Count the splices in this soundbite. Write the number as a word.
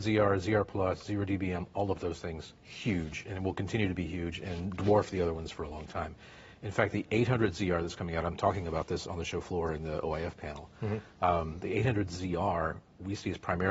one